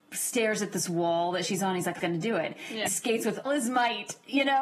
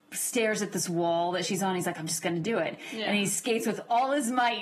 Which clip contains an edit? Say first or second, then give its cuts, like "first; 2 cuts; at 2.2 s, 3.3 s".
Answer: first; 3 cuts; at 2.0 s, 2.9 s, 3.5 s